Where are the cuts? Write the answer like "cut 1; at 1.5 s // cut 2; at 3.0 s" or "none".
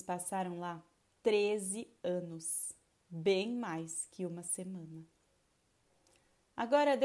cut 1; at 1.0 s // cut 2; at 2.9 s